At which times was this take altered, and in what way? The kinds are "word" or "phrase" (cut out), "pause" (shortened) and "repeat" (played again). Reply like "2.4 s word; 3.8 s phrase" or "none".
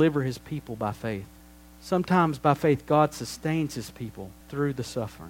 1.4 s pause; 4.4 s pause